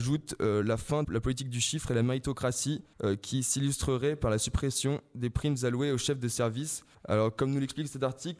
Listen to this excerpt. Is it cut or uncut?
cut